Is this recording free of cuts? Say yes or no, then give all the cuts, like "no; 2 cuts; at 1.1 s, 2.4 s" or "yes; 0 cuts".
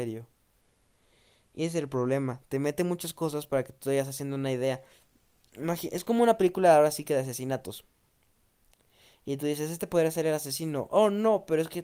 yes; 0 cuts